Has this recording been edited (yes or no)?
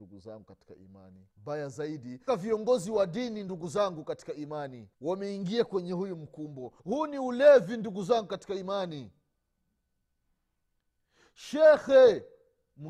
yes